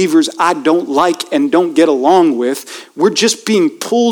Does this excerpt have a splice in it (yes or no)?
no